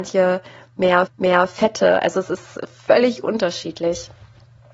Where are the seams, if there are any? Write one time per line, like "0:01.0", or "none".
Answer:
0:01.1